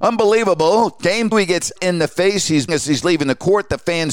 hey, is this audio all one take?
no; 3 cuts; at 1.3 s, 1.8 s, 2.7 s

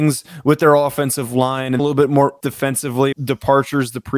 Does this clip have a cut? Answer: yes; 3 cuts; at 1.8 s, 2.4 s, 3.1 s

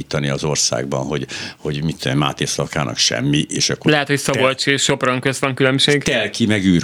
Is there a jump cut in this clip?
no; 0 cuts

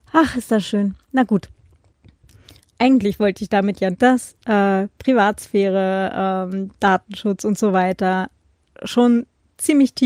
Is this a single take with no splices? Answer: no; 2 cuts; at 1.0 s, 3.9 s

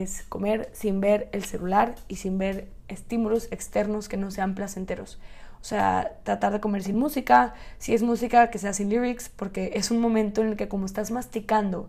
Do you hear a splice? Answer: no; 0 cuts

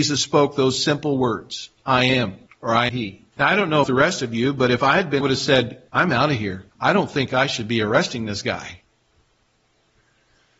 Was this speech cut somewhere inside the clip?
yes; 8 cuts; at 1.8 s, 2.5 s, 2.9 s, 3.3 s, 3.8 s, 5.2 s, 5.9 s, 6.7 s

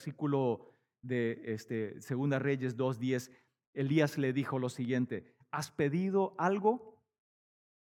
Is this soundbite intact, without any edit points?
yes; 0 cuts

